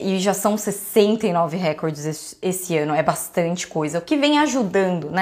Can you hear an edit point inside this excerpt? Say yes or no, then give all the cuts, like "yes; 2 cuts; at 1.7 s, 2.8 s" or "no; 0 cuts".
no; 0 cuts